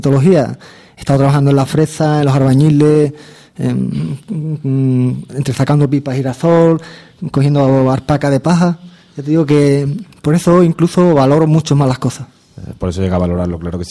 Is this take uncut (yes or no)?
yes